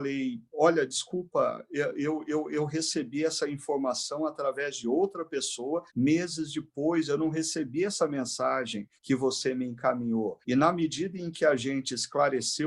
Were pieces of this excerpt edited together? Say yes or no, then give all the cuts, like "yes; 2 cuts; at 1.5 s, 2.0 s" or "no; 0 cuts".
yes; 3 cuts; at 5.9 s, 9.0 s, 10.4 s